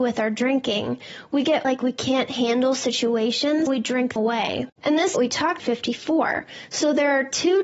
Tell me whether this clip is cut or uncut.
cut